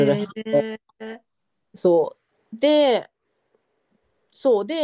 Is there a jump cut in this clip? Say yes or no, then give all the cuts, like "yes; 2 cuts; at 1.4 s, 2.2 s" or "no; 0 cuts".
no; 0 cuts